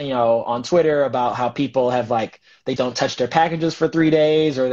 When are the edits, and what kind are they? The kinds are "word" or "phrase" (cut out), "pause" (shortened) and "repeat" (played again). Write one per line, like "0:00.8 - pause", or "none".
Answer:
0:02.8 - word